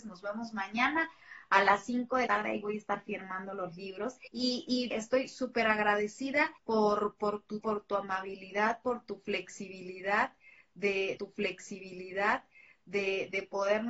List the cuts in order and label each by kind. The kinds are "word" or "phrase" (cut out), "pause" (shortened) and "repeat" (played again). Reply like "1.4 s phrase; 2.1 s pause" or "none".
2.3 s word; 4.3 s pause; 4.9 s phrase; 6.6 s pause; 7.6 s word; 11.2 s repeat